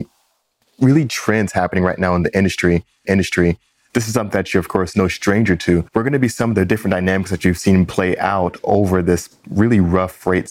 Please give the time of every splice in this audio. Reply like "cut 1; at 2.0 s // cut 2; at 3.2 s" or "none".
cut 1; at 3.0 s // cut 2; at 5.9 s